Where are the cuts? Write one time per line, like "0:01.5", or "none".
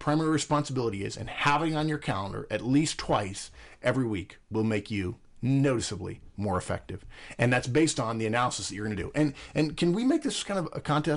none